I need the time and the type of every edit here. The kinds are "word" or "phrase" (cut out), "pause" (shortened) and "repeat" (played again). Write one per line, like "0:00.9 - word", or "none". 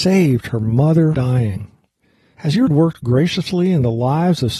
0:01.1 - word
0:02.7 - word